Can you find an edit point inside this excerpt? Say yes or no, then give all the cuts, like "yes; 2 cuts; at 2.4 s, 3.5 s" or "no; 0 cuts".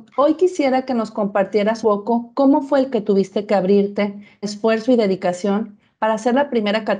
yes; 3 cuts; at 1.8 s, 2.9 s, 4.4 s